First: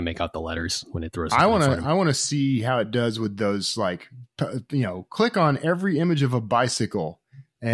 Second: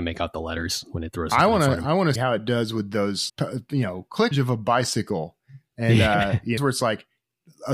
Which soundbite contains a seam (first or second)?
second